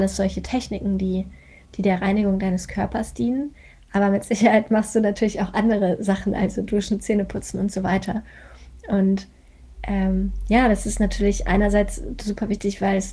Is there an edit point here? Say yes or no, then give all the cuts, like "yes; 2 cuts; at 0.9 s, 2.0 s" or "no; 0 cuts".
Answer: no; 0 cuts